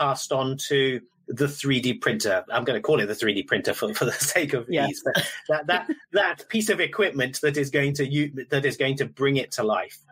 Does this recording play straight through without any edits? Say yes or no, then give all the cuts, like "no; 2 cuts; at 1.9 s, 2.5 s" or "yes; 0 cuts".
yes; 0 cuts